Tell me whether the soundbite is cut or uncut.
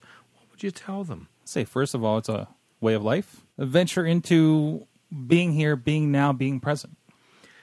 cut